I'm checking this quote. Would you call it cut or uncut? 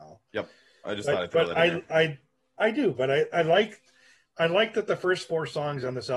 uncut